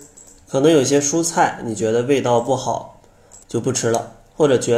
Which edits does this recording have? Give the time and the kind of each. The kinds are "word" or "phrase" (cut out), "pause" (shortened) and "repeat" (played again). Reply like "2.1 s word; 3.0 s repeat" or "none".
3.4 s pause